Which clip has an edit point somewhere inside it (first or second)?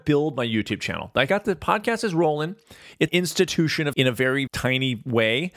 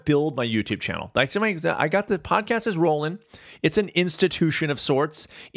first